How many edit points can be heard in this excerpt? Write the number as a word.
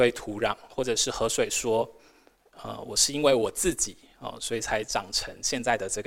zero